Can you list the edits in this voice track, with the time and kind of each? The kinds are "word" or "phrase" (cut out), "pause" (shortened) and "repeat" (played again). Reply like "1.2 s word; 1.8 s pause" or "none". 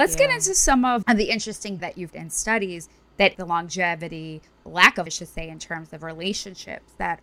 1.0 s word; 1.8 s word; 2.1 s word; 3.3 s word; 4.6 s word; 5.1 s word